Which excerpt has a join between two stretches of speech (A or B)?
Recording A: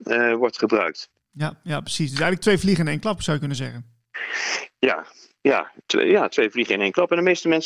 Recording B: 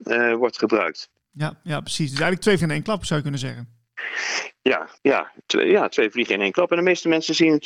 B